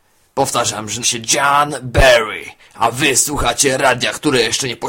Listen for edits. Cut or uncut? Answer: cut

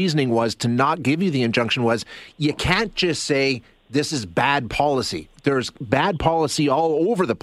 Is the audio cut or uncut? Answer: uncut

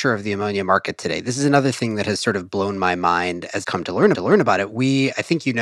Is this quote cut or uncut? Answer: cut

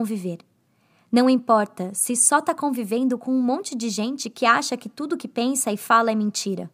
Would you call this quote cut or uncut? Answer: uncut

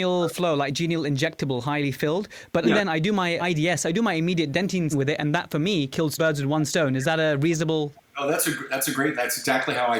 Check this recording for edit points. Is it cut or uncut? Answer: cut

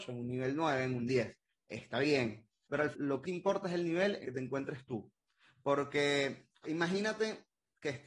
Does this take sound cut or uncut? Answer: cut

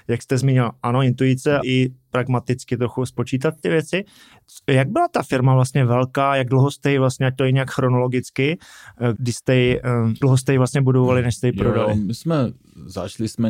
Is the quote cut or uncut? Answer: cut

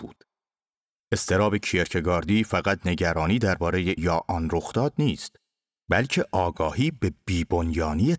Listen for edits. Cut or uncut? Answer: cut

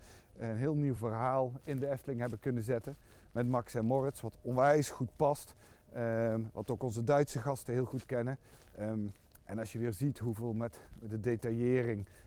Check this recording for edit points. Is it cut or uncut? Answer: uncut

